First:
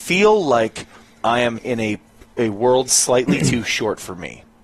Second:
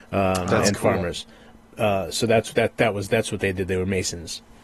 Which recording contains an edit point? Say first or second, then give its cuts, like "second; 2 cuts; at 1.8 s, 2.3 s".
first; 2 cuts; at 1.6 s, 2.9 s